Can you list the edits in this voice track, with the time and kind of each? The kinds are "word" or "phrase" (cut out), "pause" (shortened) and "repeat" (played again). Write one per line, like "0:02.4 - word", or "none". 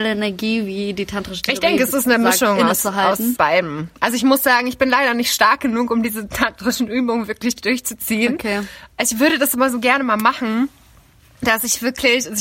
0:03.4 - word
0:08.9 - pause

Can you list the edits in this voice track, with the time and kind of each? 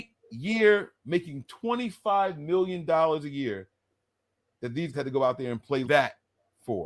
0:01.0 - word
0:04.9 - word
0:05.8 - word

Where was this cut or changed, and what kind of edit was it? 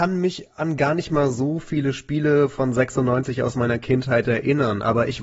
none

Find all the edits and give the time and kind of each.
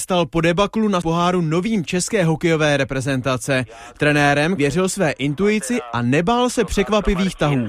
0:01.0 - word
0:01.9 - word
0:04.6 - word

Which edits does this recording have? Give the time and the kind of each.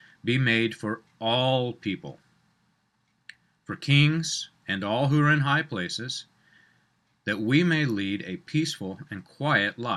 none

